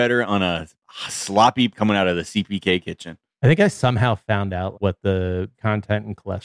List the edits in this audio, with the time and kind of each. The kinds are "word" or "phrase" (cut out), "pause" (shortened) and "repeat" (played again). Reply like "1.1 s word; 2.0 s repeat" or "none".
1.7 s word; 4.7 s word; 5.5 s word